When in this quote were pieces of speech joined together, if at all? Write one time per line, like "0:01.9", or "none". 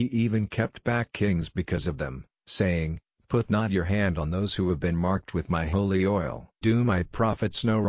0:06.6